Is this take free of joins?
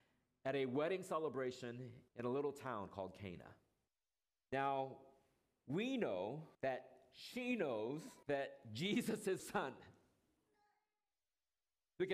no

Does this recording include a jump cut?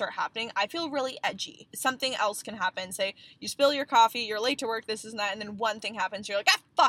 yes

